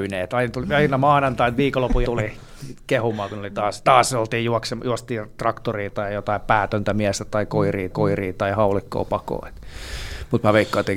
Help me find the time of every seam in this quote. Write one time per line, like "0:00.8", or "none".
0:02.0
0:07.9